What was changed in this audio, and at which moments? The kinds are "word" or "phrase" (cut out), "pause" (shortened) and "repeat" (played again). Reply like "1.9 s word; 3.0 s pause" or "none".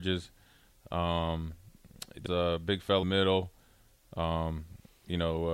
2.3 s word; 3.0 s phrase